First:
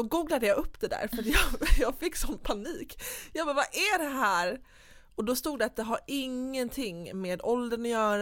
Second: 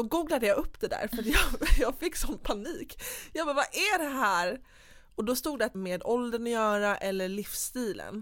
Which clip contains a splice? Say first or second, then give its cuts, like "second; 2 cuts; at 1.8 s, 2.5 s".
second; 1 cut; at 5.7 s